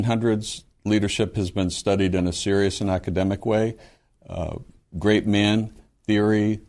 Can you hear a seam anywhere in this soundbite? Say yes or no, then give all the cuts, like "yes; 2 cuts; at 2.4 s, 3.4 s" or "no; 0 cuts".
no; 0 cuts